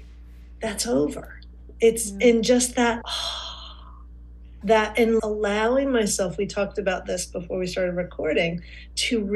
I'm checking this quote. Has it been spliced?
yes; 3 cuts; at 3.0 s, 4.6 s, 5.2 s

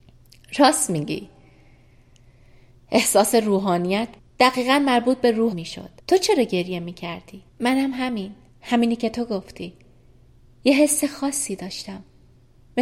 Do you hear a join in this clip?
yes; 5 cuts; at 4.2 s, 5.5 s, 6.0 s, 7.5 s, 8.5 s

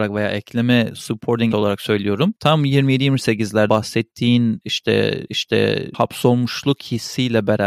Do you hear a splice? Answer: yes; 3 cuts; at 1.5 s, 3.7 s, 5.3 s

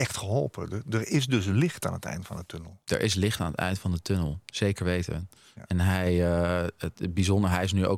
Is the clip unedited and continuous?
no; 1 cut; at 2.8 s

